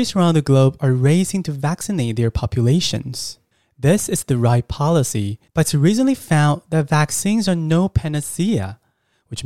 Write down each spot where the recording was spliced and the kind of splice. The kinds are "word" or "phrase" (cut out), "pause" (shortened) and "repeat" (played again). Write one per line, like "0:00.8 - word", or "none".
0:03.5 - pause
0:05.5 - pause